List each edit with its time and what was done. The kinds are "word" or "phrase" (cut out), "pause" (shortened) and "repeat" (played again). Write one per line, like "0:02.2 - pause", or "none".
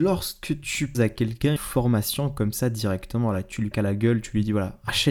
0:00.9 - word
0:01.6 - word
0:03.7 - word